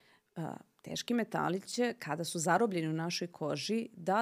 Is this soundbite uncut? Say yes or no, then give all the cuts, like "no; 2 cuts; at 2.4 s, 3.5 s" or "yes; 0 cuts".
yes; 0 cuts